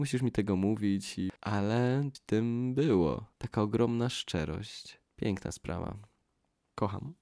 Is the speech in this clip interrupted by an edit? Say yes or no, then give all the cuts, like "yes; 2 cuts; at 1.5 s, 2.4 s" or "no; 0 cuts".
yes; 3 cuts; at 2.1 s, 3.3 s, 5.1 s